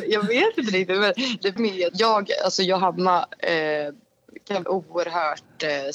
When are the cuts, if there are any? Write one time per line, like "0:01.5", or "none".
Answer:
0:01.6
0:01.9
0:04.6